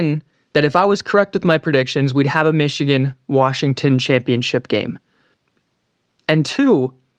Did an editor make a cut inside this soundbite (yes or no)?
no